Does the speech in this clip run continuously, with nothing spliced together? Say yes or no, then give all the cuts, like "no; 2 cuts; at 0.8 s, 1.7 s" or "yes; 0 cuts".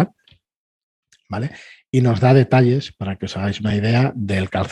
yes; 0 cuts